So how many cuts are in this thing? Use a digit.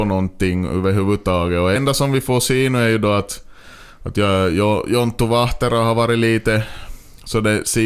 1